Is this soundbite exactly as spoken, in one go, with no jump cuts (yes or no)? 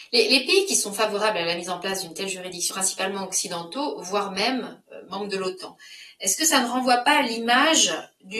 no